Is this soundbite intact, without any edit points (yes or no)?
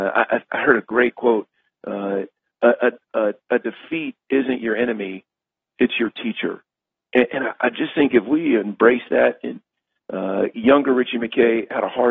yes